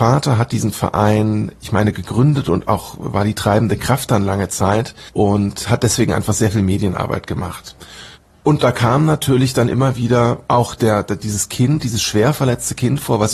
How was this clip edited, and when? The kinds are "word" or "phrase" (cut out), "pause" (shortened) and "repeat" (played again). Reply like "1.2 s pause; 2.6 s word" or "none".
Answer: 1.6 s pause; 8.1 s pause; 10.4 s pause